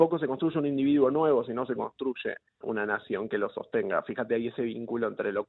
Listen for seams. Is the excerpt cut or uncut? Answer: cut